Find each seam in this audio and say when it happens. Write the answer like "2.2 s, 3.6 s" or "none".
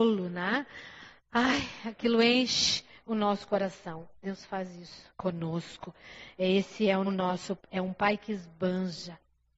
1.2 s, 5.1 s, 7.1 s, 7.6 s